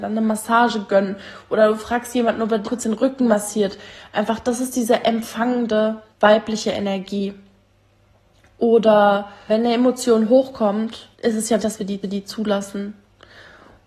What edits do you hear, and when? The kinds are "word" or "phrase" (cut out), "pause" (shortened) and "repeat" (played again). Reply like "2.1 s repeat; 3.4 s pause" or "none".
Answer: 2.6 s word; 6.1 s pause; 9.5 s word; 11.1 s pause; 11.6 s word; 12.0 s repeat